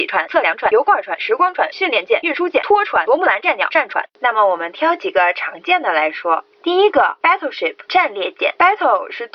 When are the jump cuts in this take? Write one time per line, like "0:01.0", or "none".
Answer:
0:04.2